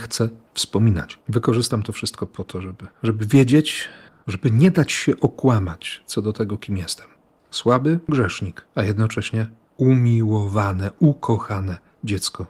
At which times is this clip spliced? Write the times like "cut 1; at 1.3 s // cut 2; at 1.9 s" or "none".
cut 1; at 1.2 s // cut 2; at 2.9 s // cut 3; at 4.1 s // cut 4; at 7.2 s // cut 5; at 8.7 s